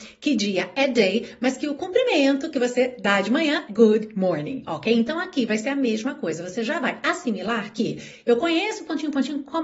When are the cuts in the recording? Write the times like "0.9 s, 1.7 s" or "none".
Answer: 3.7 s